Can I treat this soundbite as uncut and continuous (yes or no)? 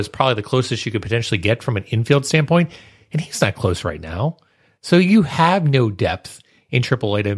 yes